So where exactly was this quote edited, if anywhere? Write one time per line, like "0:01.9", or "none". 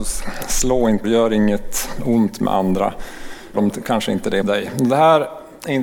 0:01.0
0:03.5
0:04.4